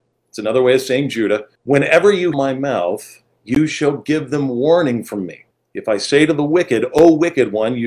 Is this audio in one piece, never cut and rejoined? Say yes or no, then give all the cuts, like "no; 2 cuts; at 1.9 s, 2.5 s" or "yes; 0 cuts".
no; 3 cuts; at 1.6 s, 2.3 s, 5.5 s